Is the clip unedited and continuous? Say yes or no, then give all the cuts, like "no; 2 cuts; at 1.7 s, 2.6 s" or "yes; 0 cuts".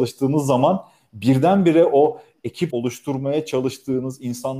no; 1 cut; at 2.7 s